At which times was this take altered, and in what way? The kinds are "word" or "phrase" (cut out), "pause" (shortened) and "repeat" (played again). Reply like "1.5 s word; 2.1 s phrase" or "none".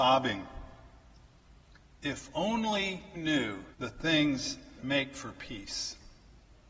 3.1 s word; 3.7 s pause; 4.8 s word